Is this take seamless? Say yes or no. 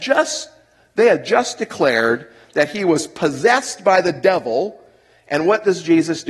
yes